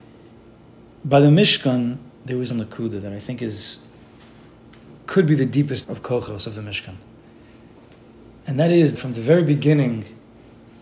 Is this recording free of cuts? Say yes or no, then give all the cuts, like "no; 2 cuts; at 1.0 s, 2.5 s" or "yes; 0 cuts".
no; 4 cuts; at 2.5 s, 5.8 s, 8.4 s, 9.0 s